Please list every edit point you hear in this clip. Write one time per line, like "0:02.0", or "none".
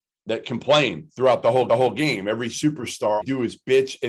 0:01.7
0:03.2